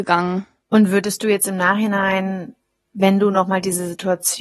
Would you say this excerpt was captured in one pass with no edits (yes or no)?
yes